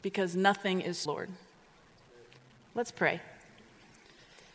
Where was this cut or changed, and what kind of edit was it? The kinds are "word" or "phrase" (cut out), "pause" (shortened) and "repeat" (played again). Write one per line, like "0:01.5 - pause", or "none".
0:01.1 - phrase